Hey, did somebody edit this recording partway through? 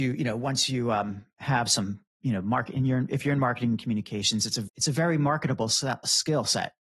no; 0 cuts

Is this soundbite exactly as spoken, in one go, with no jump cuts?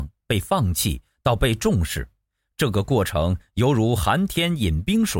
yes; 0 cuts

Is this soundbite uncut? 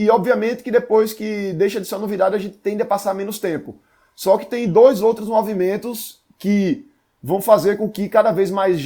yes; 0 cuts

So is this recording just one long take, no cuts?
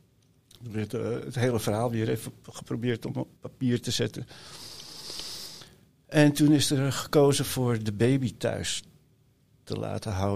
no; 1 cut; at 3.4 s

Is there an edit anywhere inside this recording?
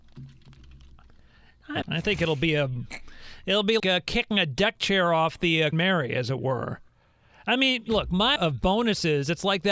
yes; 4 cuts; at 1.8 s, 3.8 s, 5.7 s, 8.4 s

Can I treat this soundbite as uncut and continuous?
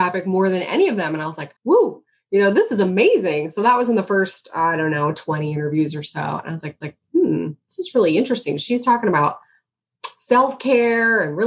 no; 2 cuts; at 1.6 s, 6.8 s

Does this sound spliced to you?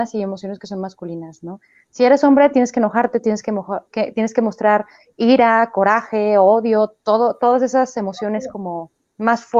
no; 0 cuts

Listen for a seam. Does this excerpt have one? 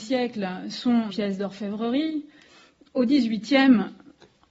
yes; 1 cut; at 1.1 s

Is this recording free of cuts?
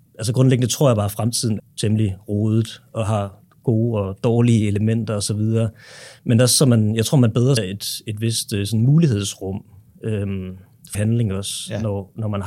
no; 3 cuts; at 1.6 s, 7.6 s, 10.9 s

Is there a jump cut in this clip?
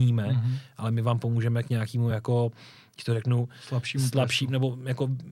no; 0 cuts

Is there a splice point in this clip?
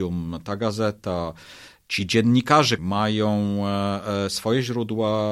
yes; 1 cut; at 2.8 s

